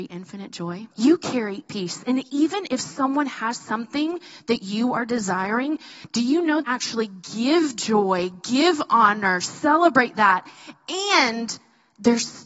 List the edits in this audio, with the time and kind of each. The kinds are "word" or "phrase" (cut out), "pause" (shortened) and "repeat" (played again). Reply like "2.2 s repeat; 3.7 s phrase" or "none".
0.9 s pause; 1.7 s phrase; 6.6 s phrase